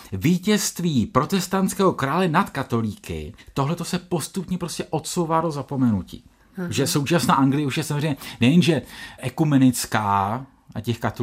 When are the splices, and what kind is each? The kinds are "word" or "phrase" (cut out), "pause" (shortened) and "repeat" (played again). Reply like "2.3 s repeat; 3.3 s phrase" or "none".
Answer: none